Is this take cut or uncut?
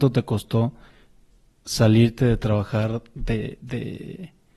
uncut